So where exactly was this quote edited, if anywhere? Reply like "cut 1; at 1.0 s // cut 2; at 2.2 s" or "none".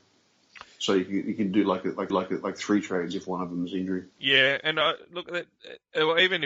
cut 1; at 2.1 s // cut 2; at 4.1 s